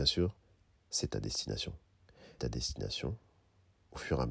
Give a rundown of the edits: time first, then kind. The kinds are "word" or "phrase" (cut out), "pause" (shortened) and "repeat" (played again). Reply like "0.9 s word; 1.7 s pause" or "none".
2.4 s word